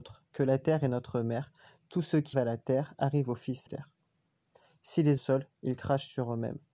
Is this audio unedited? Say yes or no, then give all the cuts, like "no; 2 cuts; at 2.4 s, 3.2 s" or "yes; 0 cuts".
no; 3 cuts; at 2.3 s, 3.7 s, 5.2 s